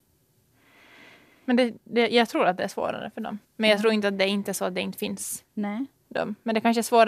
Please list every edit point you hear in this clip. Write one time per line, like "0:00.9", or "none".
0:03.4
0:05.5